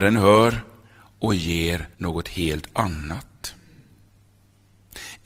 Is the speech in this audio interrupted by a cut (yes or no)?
yes